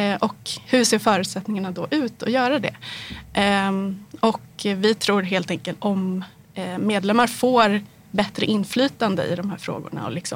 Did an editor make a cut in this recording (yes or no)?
yes